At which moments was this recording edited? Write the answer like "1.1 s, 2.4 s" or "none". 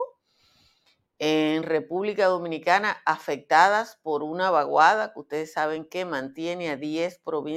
none